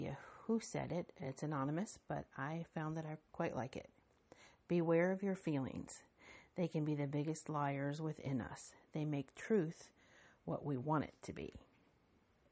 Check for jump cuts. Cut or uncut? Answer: uncut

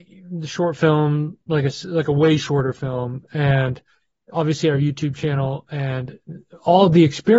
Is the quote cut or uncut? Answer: uncut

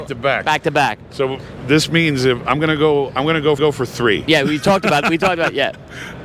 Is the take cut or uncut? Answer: cut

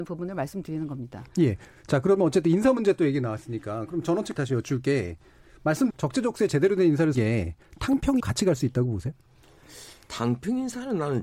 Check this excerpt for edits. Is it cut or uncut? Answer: cut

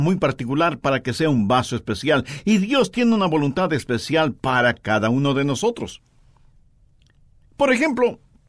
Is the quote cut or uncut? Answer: uncut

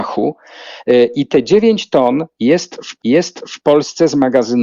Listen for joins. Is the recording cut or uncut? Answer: cut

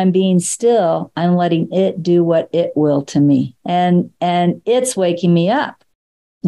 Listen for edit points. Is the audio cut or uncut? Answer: cut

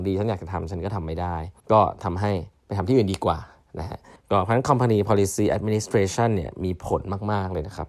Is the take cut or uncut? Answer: cut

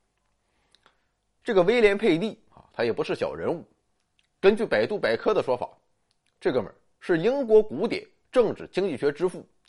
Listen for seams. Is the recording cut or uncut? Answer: uncut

